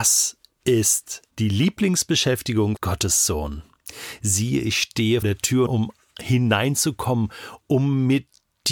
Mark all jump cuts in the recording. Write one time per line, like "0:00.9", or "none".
0:01.3
0:02.8
0:05.2
0:05.7